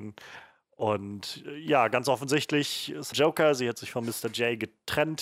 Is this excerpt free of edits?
no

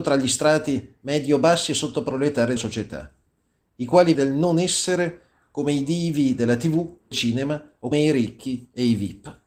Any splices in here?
yes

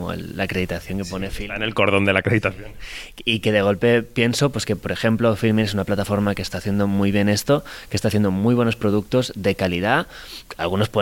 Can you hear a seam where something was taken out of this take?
no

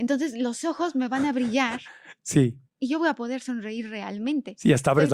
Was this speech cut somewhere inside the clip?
yes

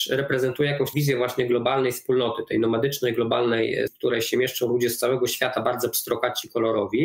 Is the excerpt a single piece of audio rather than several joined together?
no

